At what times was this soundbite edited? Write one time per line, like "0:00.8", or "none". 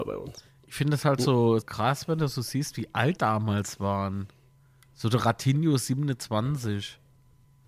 0:01.6
0:03.2